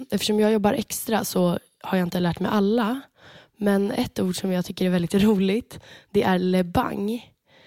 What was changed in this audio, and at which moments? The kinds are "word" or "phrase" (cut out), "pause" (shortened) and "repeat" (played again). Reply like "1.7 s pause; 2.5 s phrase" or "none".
none